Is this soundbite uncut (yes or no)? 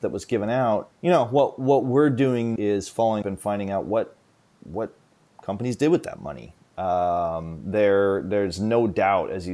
no